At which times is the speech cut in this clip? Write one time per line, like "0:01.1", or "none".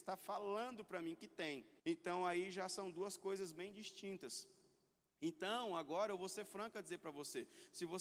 0:01.8

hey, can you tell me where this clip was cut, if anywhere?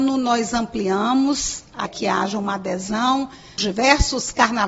0:01.9
0:03.6

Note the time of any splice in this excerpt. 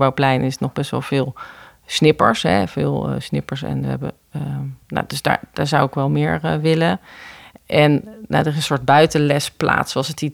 0:04.8

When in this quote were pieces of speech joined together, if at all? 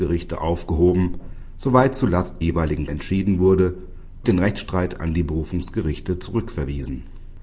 0:02.4
0:02.9
0:04.2

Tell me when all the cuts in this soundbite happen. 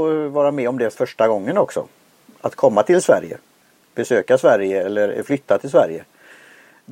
0:00.9

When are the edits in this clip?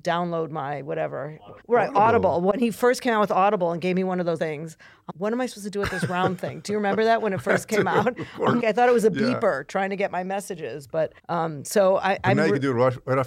0:01.6
0:04.4
0:05.1
0:08.6
0:11.2

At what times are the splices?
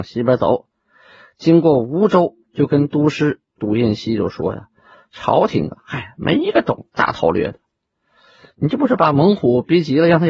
0:02.4

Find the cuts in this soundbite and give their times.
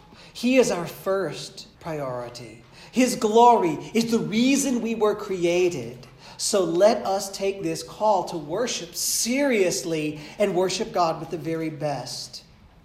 0:01.7

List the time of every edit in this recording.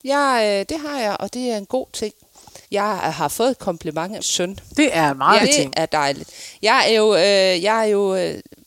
0:02.6
0:04.2
0:05.4

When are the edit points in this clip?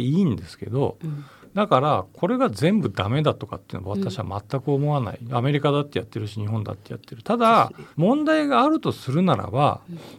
0:07.9

